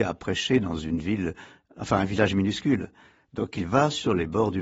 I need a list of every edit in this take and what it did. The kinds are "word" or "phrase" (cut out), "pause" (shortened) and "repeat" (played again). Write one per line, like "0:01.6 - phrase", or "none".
none